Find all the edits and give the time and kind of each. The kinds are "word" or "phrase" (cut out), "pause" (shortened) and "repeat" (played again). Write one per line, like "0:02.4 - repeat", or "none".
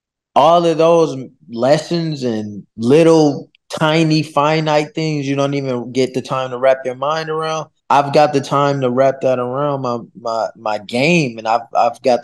0:02.7 - pause
0:07.8 - pause